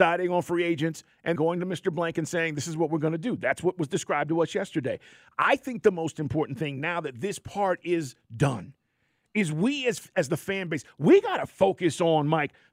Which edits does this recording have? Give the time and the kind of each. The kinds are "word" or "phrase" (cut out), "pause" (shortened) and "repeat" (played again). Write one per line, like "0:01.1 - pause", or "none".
0:01.4 - word

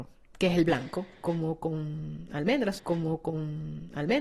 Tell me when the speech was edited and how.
0:02.8 - repeat

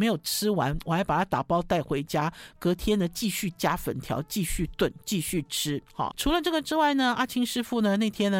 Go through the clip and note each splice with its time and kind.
0:06.1 - word

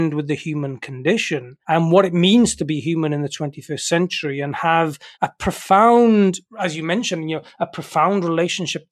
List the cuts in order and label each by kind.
0:01.6 - pause
0:05.1 - pause
0:06.5 - pause

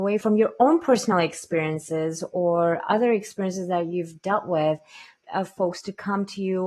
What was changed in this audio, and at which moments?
none

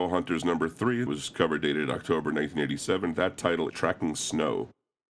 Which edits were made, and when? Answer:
0:01.1 - word
0:03.7 - word

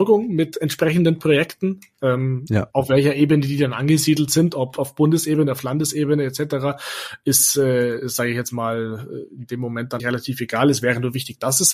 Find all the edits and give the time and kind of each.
0:10.0 - word

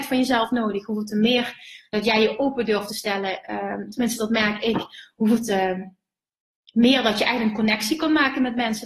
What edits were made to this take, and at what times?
none

